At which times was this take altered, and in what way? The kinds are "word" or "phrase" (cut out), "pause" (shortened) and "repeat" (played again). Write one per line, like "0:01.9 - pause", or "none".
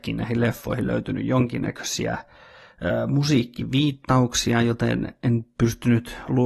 none